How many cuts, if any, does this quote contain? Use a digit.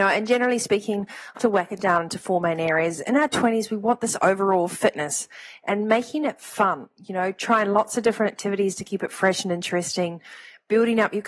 1